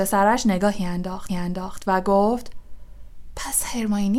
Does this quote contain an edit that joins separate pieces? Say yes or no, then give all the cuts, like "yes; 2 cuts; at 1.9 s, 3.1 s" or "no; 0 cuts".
yes; 1 cut; at 1.3 s